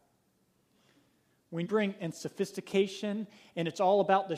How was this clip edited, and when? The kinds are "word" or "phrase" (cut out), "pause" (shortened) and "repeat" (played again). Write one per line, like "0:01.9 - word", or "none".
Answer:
0:01.6 - word
0:02.0 - word